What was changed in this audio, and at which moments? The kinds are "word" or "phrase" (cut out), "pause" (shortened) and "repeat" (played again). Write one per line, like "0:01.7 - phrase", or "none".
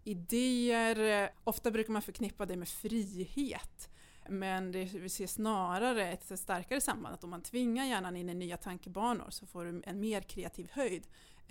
0:01.3 - word
0:04.3 - word
0:07.1 - word